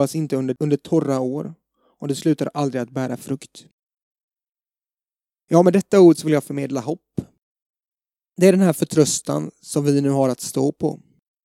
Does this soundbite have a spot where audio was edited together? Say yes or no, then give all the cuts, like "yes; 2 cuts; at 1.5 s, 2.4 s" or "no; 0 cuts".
no; 0 cuts